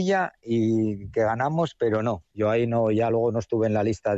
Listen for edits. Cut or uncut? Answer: uncut